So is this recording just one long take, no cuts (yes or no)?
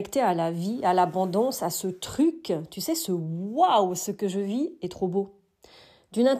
yes